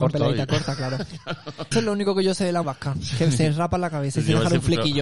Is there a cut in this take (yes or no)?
yes